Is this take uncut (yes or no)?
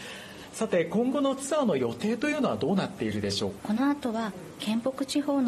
no